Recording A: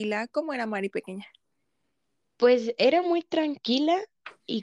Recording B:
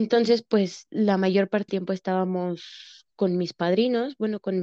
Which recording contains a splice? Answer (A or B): B